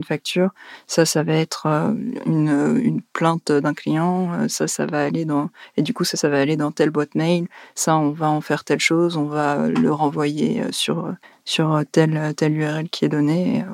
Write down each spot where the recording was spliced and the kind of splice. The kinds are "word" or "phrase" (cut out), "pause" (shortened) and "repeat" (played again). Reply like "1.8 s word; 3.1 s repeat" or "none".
11.2 s pause